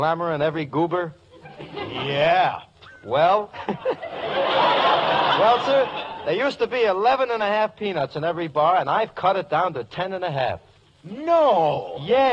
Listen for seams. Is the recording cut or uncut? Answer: uncut